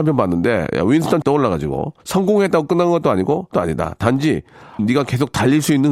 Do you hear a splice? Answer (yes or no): yes